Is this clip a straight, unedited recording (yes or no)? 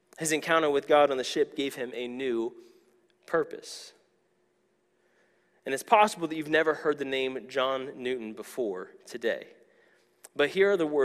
yes